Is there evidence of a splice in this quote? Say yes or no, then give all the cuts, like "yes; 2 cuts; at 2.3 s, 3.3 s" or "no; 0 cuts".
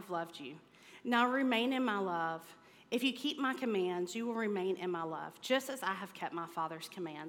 no; 0 cuts